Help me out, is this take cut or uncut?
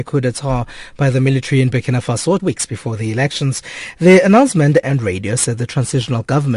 cut